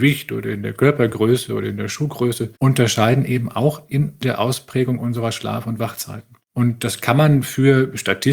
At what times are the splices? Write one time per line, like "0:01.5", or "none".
0:02.6